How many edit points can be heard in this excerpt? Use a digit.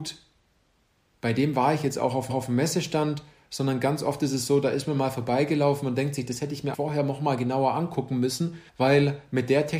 3